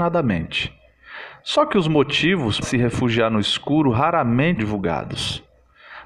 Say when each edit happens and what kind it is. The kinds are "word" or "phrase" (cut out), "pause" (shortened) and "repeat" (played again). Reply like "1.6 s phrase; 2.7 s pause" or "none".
2.6 s word; 4.6 s word